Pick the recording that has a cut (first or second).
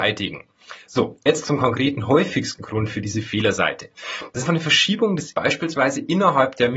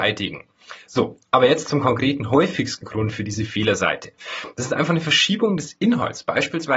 first